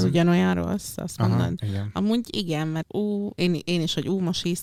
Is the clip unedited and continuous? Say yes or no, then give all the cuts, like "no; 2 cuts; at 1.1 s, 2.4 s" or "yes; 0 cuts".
no; 1 cut; at 2.8 s